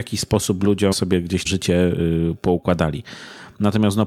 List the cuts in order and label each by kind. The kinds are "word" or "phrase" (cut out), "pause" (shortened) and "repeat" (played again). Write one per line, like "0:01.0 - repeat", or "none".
0:00.9 - word
0:01.5 - word